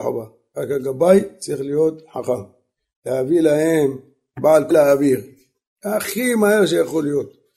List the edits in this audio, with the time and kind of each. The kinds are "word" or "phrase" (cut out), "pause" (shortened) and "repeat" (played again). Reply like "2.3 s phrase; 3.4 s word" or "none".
4.7 s phrase